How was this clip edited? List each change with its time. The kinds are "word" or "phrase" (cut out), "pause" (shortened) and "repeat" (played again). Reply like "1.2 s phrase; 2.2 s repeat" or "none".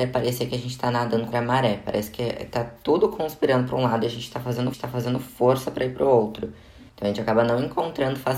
1.3 s word; 4.7 s repeat; 6.9 s pause